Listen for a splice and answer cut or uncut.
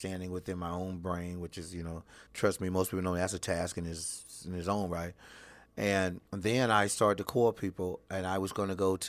cut